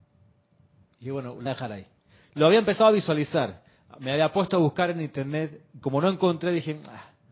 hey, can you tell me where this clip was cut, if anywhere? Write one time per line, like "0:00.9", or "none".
0:01.5